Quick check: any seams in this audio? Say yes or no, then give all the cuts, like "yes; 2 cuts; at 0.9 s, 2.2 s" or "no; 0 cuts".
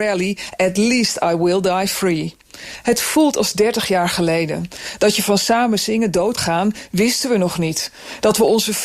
yes; 1 cut; at 6.4 s